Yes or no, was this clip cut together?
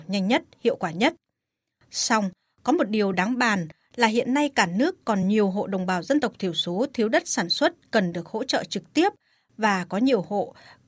no